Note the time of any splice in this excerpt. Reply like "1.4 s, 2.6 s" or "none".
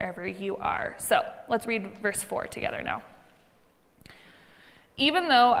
none